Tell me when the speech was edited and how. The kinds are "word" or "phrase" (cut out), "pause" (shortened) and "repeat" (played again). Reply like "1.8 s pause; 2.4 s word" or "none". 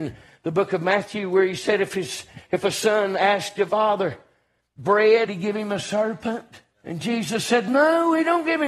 3.7 s word; 5.3 s phrase; 6.7 s pause